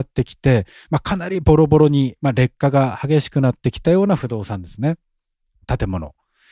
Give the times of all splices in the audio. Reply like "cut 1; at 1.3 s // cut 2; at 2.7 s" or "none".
none

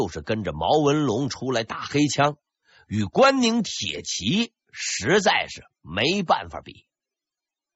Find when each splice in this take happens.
none

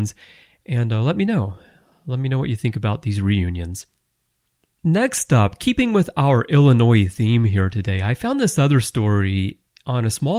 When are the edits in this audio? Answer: none

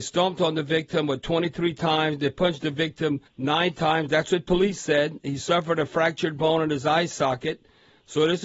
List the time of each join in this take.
cut 1; at 3.3 s

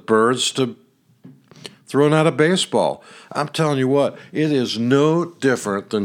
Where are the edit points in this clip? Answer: none

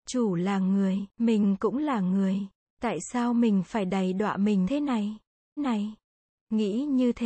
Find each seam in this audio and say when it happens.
cut 1; at 1.1 s // cut 2; at 4.6 s // cut 3; at 5.6 s

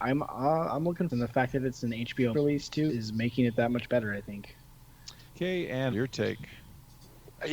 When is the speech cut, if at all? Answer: cut 1; at 1.1 s // cut 2; at 2.3 s // cut 3; at 2.9 s // cut 4; at 5.3 s // cut 5; at 5.9 s

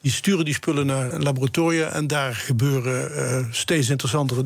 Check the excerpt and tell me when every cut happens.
cut 1; at 1.1 s

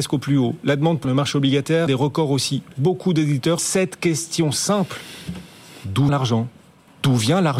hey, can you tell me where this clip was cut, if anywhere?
cut 1; at 1.0 s // cut 2; at 1.9 s // cut 3; at 3.6 s // cut 4; at 6.1 s

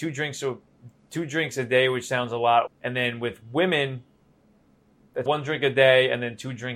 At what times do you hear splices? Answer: cut 1; at 2.7 s // cut 2; at 5.3 s

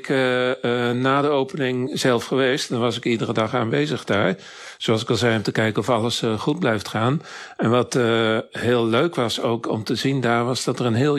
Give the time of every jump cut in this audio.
none

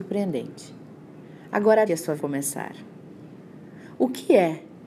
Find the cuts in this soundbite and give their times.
cut 1; at 1.9 s // cut 2; at 2.2 s

